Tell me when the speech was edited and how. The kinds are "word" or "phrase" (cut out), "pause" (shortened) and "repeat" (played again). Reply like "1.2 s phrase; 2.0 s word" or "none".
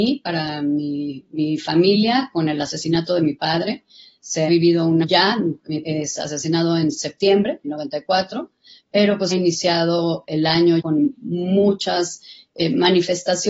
4.5 s word; 5.0 s word; 5.8 s word; 7.6 s word; 9.3 s word; 10.8 s word

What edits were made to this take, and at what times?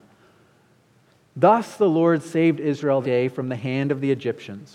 3.0 s word

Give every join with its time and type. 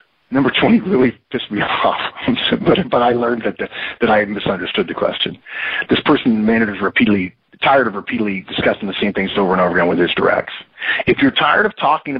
none

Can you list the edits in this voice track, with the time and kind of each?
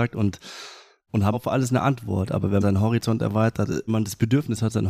1.3 s word; 2.6 s word; 3.9 s phrase

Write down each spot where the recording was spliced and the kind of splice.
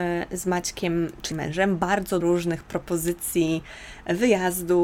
1.3 s word; 2.2 s word

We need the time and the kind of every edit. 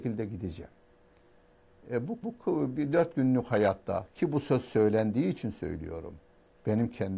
2.2 s repeat

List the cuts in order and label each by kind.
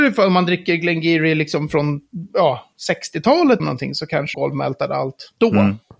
2.3 s pause; 3.6 s word; 4.3 s word

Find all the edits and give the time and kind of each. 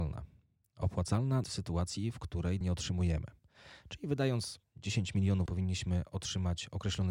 1.4 s word; 2.6 s word; 5.5 s word

